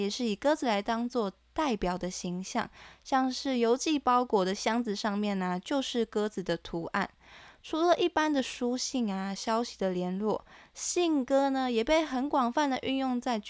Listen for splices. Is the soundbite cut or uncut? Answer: uncut